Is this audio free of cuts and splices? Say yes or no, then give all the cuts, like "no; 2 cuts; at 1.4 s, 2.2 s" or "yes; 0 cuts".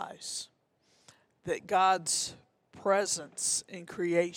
yes; 0 cuts